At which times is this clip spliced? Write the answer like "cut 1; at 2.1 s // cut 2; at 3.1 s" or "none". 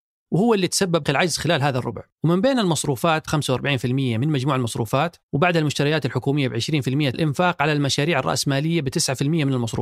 cut 1; at 1.0 s // cut 2; at 2.1 s // cut 3; at 3.3 s // cut 4; at 5.2 s // cut 5; at 7.1 s